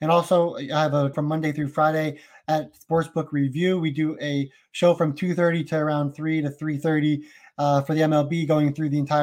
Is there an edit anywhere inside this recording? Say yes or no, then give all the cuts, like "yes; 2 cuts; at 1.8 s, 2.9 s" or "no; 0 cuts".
yes; 1 cut; at 1.1 s